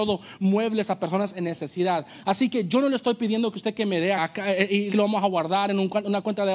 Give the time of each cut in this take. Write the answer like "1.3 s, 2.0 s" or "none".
4.2 s, 4.9 s